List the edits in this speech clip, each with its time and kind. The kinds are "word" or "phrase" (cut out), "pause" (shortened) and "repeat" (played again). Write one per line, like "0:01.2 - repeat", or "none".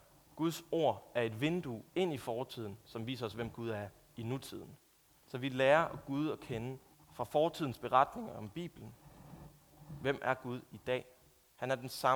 0:01.9 - pause
0:05.1 - pause
0:06.9 - pause

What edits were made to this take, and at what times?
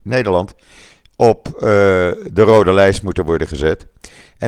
none

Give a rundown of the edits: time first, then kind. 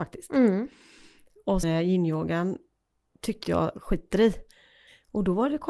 0:01.6 - word
0:03.4 - phrase

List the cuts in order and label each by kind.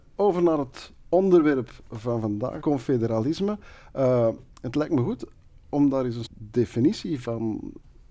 0:02.6 - word
0:06.3 - word

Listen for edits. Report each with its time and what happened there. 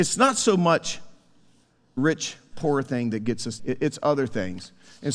0:02.0 - word
0:03.6 - word

